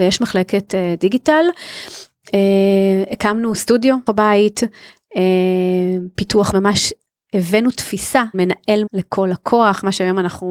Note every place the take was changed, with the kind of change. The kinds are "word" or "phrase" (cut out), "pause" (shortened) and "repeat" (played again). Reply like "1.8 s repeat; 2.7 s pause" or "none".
4.1 s word; 6.5 s word; 8.3 s word; 8.9 s word